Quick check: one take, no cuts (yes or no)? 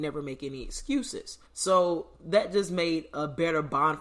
no